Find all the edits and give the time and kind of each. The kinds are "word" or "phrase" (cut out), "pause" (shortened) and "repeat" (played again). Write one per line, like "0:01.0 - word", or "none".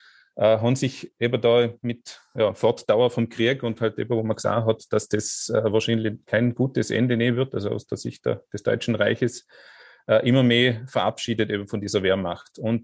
none